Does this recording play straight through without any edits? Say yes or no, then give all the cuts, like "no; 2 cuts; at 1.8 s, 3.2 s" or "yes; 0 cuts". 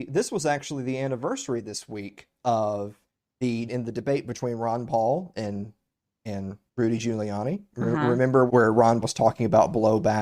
no; 4 cuts; at 3.7 s, 6.7 s, 8.5 s, 9.0 s